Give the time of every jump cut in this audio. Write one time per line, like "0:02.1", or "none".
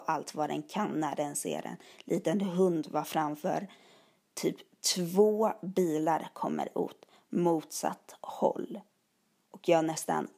none